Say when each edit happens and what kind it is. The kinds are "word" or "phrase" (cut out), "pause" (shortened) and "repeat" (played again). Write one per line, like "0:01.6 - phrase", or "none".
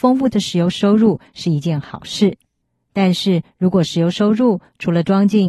none